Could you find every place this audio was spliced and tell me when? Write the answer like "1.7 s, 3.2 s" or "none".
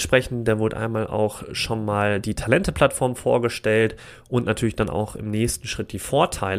none